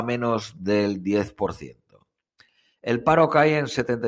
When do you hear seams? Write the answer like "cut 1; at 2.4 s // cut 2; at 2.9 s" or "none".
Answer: none

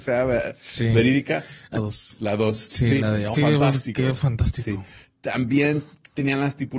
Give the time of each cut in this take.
cut 1; at 1.8 s // cut 2; at 3.3 s

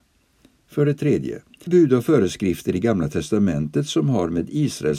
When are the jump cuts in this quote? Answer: cut 1; at 1.7 s

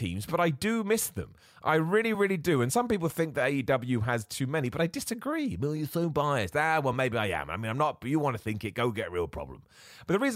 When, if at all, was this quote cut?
none

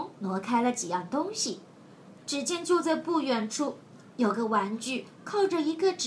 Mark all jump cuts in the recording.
none

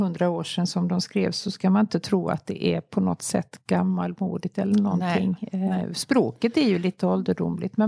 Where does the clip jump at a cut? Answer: none

